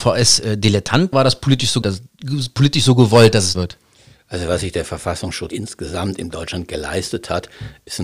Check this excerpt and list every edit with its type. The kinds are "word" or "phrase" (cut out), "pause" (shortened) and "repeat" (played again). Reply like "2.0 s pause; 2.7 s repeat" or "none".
1.1 s word; 1.8 s word; 3.5 s word; 5.5 s word